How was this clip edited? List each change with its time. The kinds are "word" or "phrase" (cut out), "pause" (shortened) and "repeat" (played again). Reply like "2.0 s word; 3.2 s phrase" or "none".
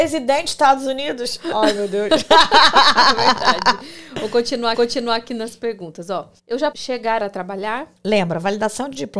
4.7 s repeat; 6.4 s pause; 6.7 s word; 7.2 s phrase; 8.0 s pause